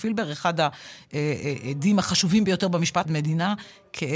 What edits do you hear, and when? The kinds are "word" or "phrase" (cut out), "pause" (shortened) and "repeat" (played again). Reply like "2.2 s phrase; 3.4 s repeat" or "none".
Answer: 3.0 s phrase